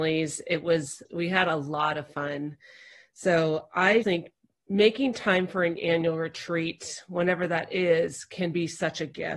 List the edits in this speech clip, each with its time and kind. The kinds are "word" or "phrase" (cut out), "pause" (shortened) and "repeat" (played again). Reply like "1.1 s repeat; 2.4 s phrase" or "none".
1.1 s word; 4.0 s word